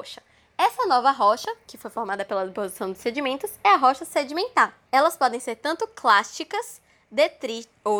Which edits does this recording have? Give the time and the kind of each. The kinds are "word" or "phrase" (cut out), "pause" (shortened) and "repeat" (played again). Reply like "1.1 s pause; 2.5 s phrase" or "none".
4.8 s pause